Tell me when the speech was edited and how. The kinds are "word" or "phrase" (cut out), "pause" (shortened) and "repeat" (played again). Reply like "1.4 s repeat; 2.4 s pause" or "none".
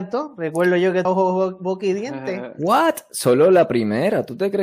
1.0 s phrase